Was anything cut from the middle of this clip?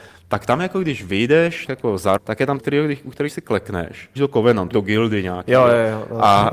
yes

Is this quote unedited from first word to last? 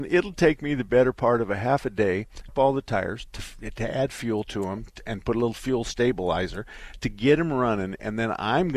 no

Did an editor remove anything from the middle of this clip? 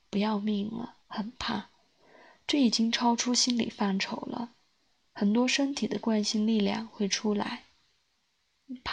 yes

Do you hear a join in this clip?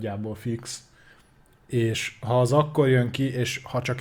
no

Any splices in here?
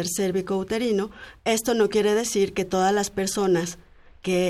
no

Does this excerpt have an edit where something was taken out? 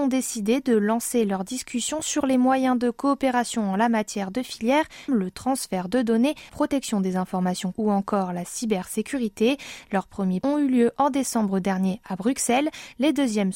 yes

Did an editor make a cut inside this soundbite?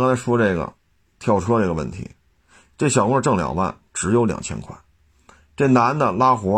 no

